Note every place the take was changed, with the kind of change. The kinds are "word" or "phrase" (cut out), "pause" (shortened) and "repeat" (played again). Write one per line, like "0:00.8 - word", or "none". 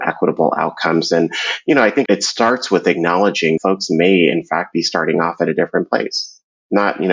0:02.1 - word
0:03.6 - word

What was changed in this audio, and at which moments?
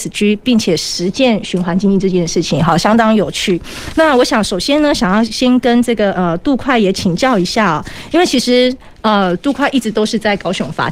none

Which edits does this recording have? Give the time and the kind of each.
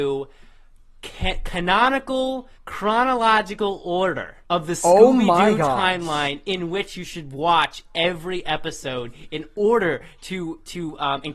0:02.5 - pause
0:04.4 - pause

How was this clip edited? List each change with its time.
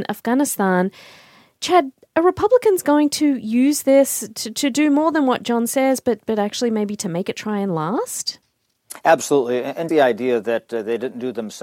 0:09.9 - word

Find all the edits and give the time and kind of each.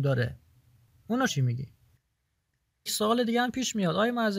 0:01.3 - word
0:02.9 - word

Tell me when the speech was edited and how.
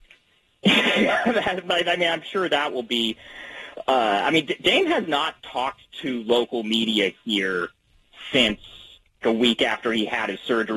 0:09.2 - word

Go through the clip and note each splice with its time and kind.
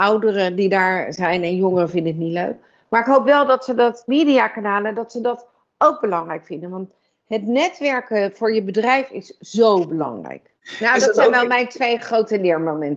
0:04.1 - phrase

